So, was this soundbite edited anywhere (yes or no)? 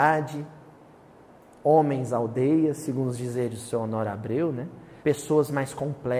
yes